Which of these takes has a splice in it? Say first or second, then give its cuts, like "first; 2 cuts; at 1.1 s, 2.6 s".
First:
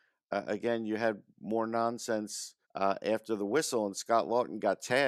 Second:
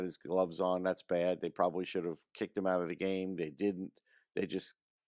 first; 2 cuts; at 1.3 s, 2.6 s